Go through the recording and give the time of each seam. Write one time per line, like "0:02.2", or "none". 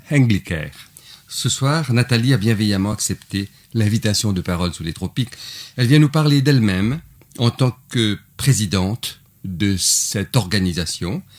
none